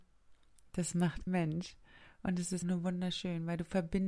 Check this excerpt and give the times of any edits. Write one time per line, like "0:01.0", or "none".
0:01.3
0:02.6